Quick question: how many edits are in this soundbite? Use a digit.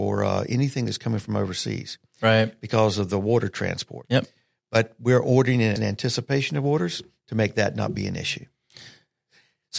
1